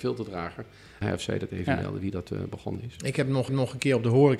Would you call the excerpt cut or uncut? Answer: cut